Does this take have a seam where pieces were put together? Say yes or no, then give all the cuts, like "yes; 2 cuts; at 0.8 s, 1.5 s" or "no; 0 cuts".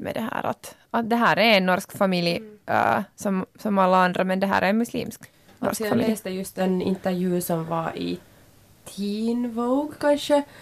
no; 0 cuts